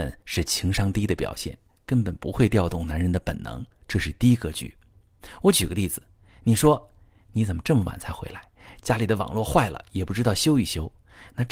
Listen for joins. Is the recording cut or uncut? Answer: uncut